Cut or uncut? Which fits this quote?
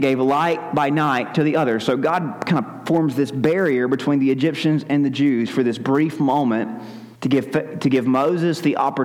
cut